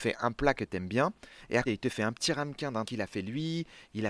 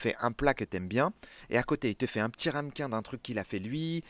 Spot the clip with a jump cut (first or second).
first